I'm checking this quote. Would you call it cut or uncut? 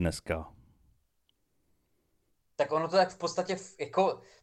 uncut